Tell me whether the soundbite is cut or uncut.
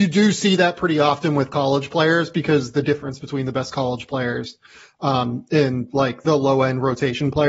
uncut